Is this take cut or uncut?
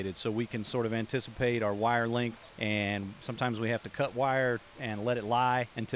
uncut